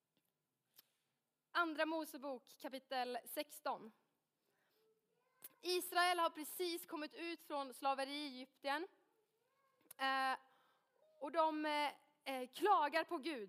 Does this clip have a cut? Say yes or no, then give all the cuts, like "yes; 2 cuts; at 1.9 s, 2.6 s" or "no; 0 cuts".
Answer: no; 0 cuts